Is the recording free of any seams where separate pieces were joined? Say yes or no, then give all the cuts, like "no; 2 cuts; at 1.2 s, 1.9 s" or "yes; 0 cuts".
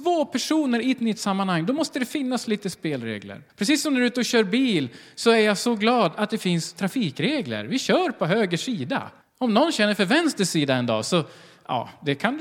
no; 2 cuts; at 3.5 s, 9.2 s